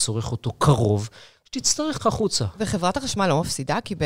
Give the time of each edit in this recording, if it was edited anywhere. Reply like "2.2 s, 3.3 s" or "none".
2.0 s

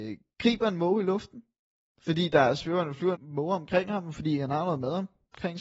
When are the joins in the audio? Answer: 1.6 s, 3.2 s

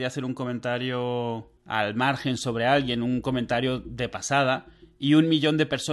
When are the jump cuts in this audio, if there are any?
1.6 s

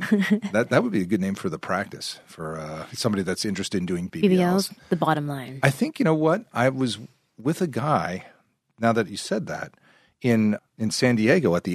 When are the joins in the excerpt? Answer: 4.1 s, 10.6 s

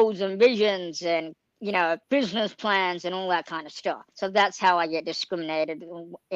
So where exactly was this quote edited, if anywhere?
2.0 s, 4.1 s

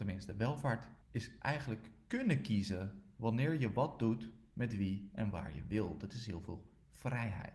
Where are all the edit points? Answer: 1.0 s

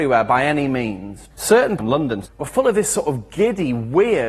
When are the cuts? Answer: 1.3 s, 1.8 s, 2.2 s

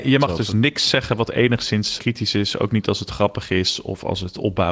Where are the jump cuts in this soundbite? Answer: 2.0 s

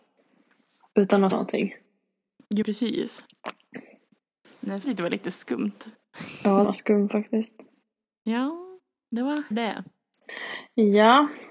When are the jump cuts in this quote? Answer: 1.3 s, 2.6 s, 4.8 s, 6.6 s, 9.5 s

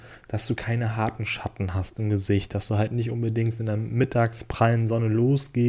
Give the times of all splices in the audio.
none

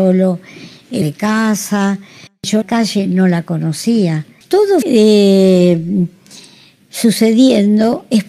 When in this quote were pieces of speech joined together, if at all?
1.0 s, 2.6 s, 4.8 s

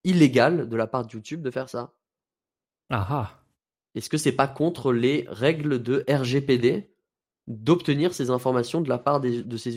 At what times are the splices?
none

